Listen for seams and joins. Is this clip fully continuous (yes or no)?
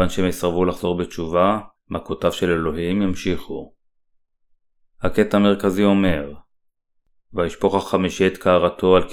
no